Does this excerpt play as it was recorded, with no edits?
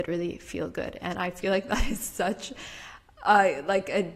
yes; 0 cuts

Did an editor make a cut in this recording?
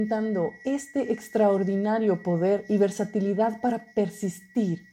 no; 0 cuts

